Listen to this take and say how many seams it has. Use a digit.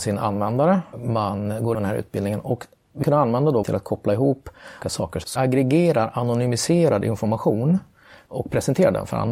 6